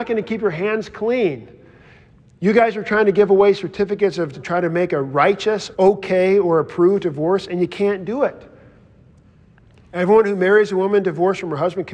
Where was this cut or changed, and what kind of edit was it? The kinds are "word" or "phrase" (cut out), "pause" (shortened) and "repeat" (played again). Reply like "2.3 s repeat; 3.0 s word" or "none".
4.3 s word; 5.7 s word